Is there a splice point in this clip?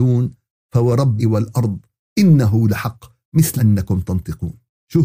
yes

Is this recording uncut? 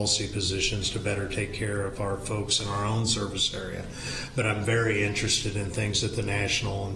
yes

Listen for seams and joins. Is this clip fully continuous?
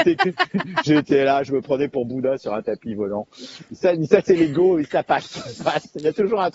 no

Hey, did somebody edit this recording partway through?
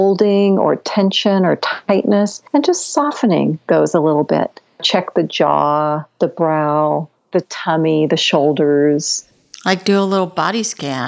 no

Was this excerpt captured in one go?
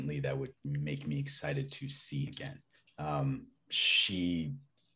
no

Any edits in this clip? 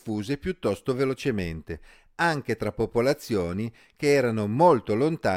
no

